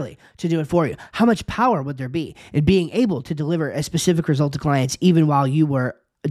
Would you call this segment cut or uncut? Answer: uncut